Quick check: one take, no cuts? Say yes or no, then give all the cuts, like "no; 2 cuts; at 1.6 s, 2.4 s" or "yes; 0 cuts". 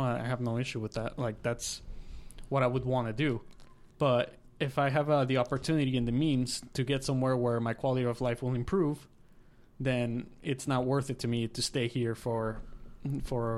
no; 1 cut; at 3.9 s